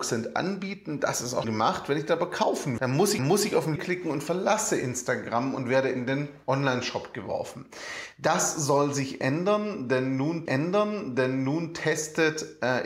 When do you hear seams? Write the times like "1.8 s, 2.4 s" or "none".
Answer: 1.4 s, 2.8 s, 3.2 s, 3.8 s, 10.5 s